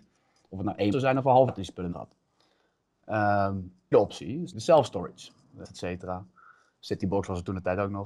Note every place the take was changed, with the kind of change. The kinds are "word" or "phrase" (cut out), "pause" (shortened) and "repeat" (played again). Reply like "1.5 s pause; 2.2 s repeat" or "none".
0.9 s word; 1.5 s word; 1.9 s word; 3.9 s word; 4.5 s word; 5.6 s word